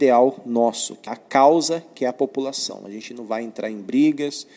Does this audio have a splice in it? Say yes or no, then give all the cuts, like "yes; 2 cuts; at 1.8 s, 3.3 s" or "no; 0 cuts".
yes; 1 cut; at 1.1 s